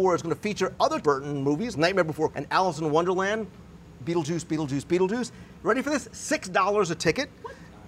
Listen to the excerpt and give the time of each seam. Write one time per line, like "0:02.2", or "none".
0:01.0
0:01.7
0:02.3